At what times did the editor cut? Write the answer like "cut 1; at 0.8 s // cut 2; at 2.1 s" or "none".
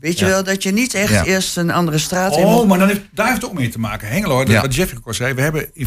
none

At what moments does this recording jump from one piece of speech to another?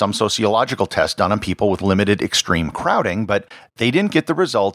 none

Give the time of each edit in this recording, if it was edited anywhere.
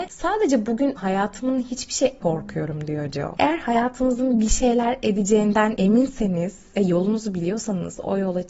cut 1; at 1.0 s // cut 2; at 2.2 s

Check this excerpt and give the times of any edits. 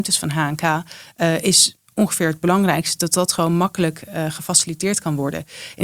none

